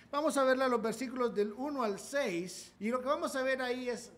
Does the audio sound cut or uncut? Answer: cut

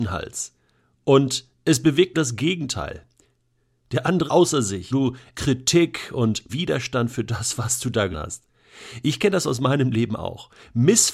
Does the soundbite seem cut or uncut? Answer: cut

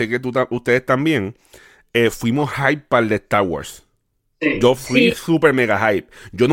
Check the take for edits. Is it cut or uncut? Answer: uncut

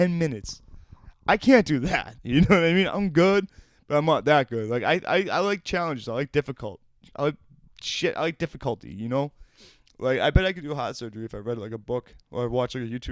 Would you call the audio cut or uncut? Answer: uncut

